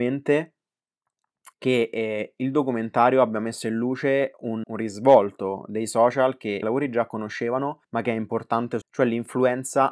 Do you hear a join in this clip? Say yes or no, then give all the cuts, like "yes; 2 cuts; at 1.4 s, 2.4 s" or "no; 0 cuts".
yes; 5 cuts; at 1.5 s, 4.6 s, 6.6 s, 7.8 s, 8.8 s